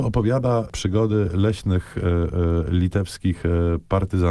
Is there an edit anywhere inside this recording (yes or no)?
no